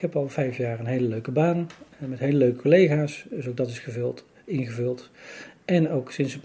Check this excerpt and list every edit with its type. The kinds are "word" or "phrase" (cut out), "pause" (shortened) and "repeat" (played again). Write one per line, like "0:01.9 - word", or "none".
none